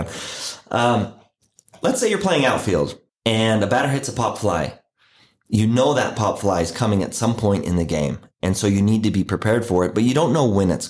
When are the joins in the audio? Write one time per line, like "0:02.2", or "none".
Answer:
none